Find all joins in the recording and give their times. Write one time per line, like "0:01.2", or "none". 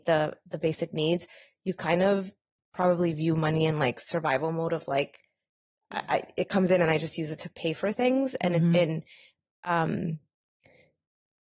none